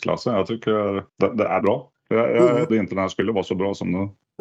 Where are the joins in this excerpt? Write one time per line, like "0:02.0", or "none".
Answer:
0:01.1
0:01.6
0:02.7

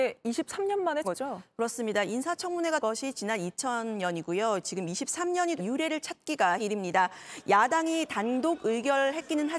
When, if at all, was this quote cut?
0:01.0
0:02.8
0:05.6
0:06.6

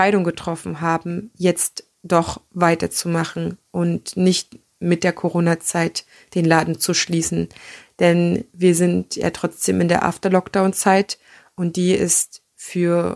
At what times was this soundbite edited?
none

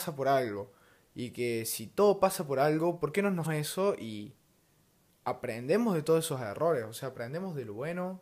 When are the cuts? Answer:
0:03.4

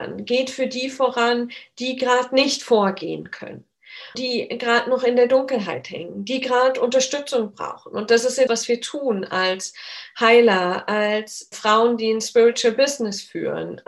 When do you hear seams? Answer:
0:04.1
0:08.5
0:11.5

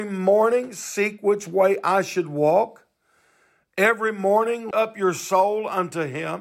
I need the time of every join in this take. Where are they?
0:04.7

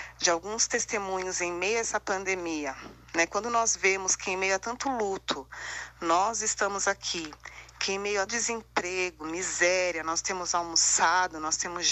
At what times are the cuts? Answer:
0:08.3

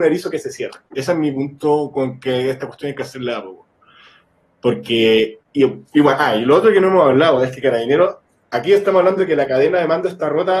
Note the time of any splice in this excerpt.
none

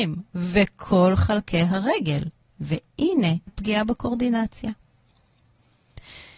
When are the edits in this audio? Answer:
0:03.5

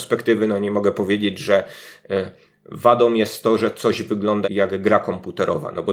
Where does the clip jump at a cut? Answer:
0:04.4

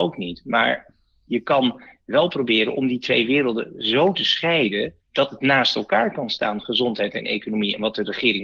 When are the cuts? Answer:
0:05.0

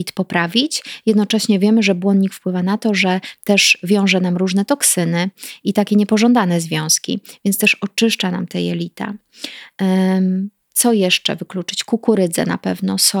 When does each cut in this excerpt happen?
0:10.6

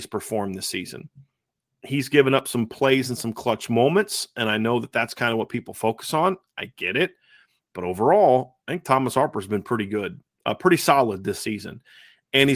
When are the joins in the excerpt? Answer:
none

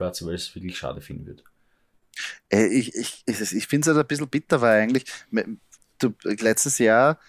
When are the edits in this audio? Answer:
0:05.8

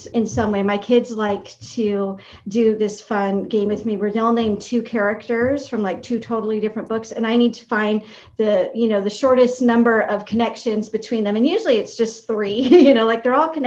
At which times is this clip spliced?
none

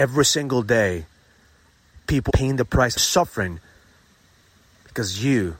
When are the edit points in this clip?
0:02.3
0:03.0

